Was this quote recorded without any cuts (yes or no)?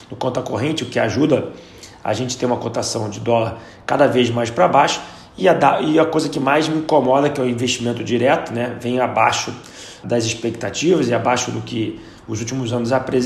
no